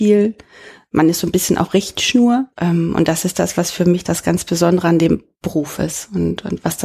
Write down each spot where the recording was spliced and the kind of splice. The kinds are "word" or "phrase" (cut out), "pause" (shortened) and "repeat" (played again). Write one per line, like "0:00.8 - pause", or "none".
0:02.5 - pause